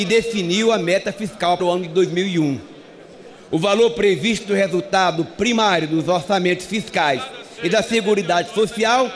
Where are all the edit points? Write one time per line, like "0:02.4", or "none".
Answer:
0:01.6